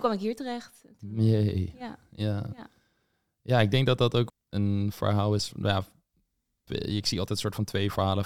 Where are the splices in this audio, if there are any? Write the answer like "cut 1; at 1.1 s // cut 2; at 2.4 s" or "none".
cut 1; at 4.3 s // cut 2; at 6.7 s